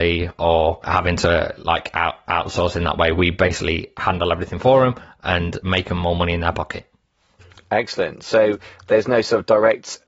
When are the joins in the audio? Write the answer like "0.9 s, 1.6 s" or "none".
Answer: none